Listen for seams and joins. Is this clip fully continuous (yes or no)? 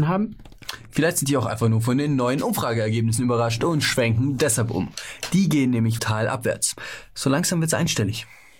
no